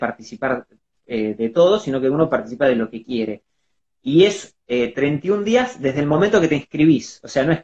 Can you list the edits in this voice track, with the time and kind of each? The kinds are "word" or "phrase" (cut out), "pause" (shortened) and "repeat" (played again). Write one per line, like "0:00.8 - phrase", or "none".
none